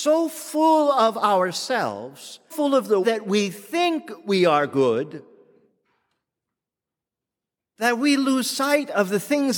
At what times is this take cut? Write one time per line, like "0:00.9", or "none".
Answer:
0:02.5
0:03.0